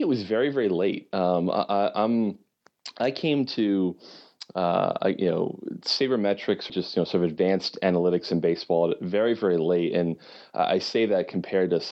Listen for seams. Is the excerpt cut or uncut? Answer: cut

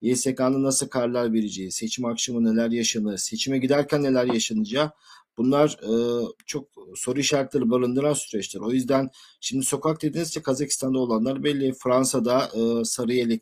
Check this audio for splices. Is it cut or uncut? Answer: cut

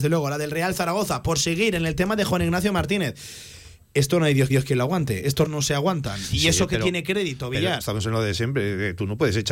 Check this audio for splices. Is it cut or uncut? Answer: cut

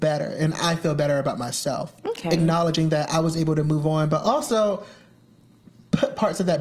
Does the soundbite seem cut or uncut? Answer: uncut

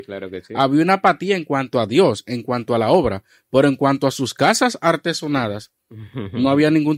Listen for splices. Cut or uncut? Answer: uncut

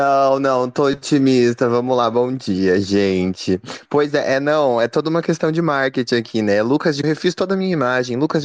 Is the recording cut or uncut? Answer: cut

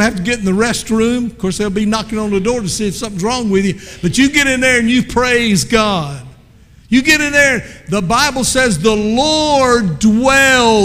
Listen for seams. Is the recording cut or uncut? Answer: uncut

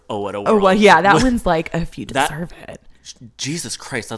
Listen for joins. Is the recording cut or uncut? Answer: uncut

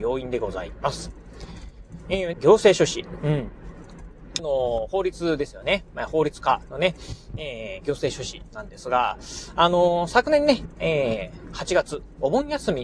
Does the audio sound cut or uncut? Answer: cut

